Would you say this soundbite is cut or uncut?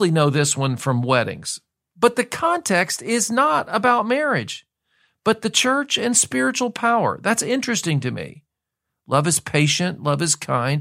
uncut